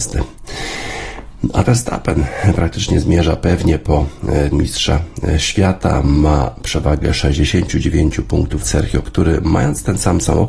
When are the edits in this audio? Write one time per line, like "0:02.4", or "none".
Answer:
0:01.6
0:04.5
0:08.6
0:09.0